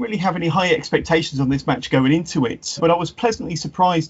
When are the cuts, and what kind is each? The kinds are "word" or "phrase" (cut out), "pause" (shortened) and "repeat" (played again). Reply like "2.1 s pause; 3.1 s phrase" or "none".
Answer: 2.8 s word